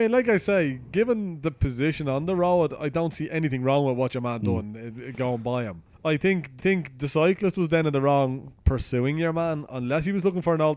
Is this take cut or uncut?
cut